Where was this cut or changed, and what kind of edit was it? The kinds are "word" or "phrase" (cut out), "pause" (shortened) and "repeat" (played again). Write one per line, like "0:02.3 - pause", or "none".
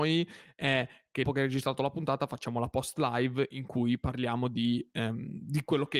0:01.2 - word